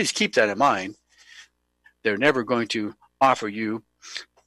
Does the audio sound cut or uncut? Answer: uncut